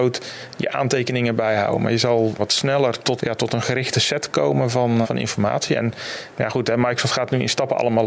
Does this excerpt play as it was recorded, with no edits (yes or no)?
no